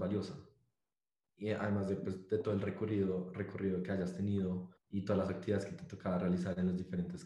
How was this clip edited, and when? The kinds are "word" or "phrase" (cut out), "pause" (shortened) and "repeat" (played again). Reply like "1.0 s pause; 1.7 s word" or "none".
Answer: 4.8 s pause